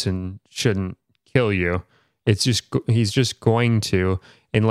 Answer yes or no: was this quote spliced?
no